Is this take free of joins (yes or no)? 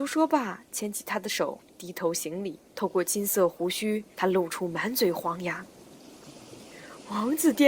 no